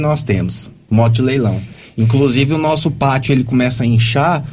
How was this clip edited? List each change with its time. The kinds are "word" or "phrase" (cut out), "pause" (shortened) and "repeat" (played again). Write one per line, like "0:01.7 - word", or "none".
none